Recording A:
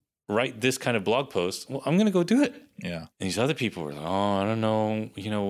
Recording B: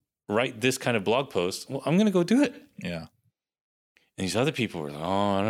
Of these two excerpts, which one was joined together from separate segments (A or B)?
A